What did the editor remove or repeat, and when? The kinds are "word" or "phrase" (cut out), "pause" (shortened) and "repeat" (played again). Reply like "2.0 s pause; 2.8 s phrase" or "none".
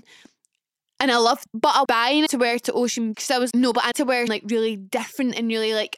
1.4 s word; 1.8 s word; 2.3 s word; 3.1 s word; 3.5 s word; 3.9 s word; 4.3 s word

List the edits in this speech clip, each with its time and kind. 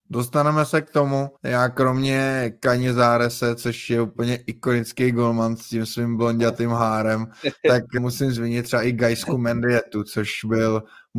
1.4 s pause; 8.0 s word

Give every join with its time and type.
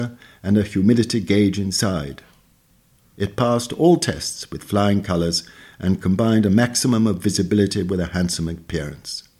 none

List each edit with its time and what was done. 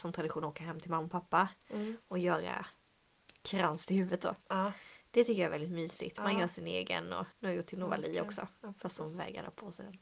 7.3 s pause

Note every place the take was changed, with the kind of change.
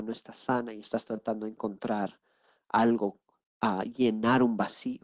none

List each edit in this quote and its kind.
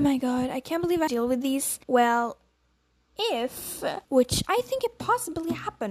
1.1 s phrase; 1.8 s pause; 4.0 s pause

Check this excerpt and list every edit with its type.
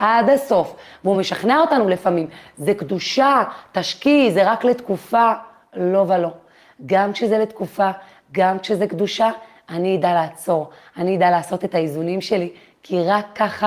none

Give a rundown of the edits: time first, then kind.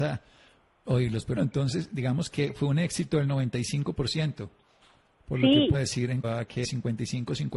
1.4 s word; 5.7 s word; 6.2 s word; 6.6 s word

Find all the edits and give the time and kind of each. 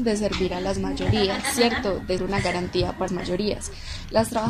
2.2 s word; 3.1 s word

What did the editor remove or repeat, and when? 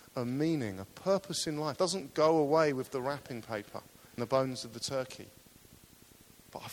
1.8 s word; 4.2 s word

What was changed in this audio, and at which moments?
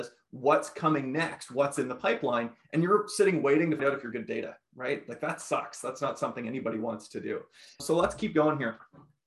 3.8 s word; 4.1 s word; 7.8 s word

